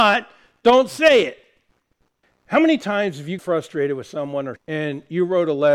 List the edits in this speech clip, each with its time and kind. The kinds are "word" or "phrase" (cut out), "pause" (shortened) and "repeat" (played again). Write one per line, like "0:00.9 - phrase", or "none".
0:03.4 - word
0:04.6 - word

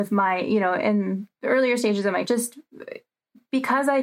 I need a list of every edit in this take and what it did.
0:02.2 - word

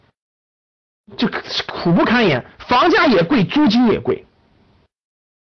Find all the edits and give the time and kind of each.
none

